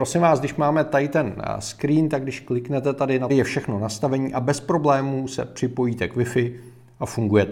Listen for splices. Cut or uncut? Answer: cut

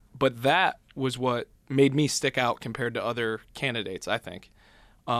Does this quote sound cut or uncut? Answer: cut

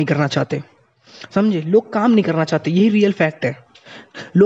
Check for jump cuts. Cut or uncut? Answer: uncut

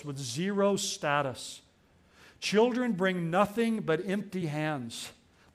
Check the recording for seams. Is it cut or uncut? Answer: uncut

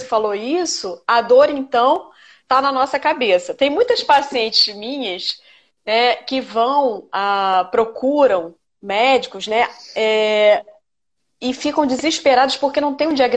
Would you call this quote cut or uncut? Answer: uncut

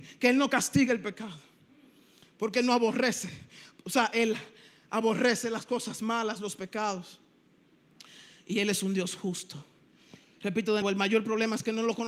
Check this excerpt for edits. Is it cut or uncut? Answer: cut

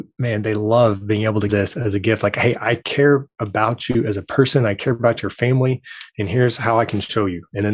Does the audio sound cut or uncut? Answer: cut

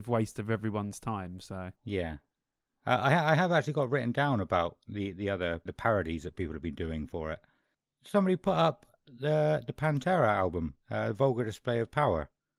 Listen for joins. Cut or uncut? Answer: cut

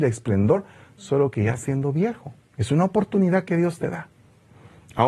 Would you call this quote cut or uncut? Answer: cut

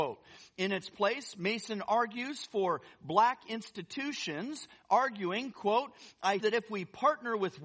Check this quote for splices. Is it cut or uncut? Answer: cut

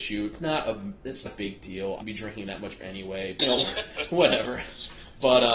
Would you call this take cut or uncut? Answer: cut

